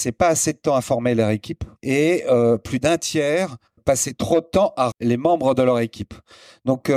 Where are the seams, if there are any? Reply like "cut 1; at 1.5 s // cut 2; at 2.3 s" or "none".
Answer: cut 1; at 1.8 s // cut 2; at 3.8 s // cut 3; at 4.9 s